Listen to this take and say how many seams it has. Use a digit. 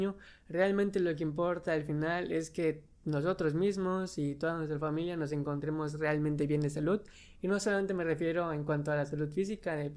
0